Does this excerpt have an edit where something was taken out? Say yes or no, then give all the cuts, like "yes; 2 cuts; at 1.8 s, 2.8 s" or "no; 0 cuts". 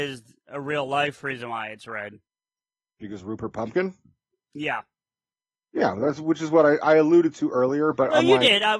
no; 0 cuts